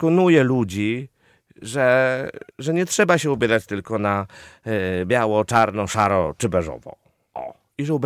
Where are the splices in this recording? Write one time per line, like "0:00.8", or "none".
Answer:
0:02.5